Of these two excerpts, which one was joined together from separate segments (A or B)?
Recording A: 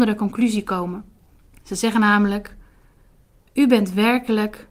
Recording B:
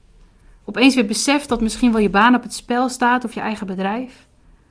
A